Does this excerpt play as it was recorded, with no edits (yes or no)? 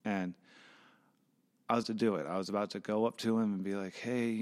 no